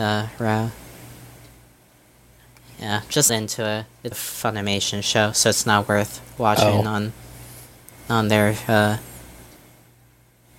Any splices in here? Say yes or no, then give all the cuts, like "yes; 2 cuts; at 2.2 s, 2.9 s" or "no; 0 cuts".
yes; 2 cuts; at 3.3 s, 4.1 s